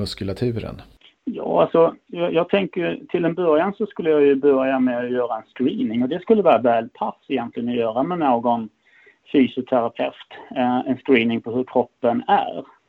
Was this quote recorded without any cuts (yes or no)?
yes